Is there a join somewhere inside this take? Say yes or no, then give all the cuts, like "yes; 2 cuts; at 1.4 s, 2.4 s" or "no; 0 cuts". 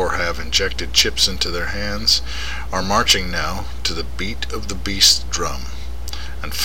no; 0 cuts